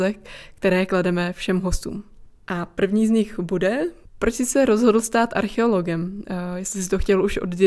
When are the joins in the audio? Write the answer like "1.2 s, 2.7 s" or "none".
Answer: none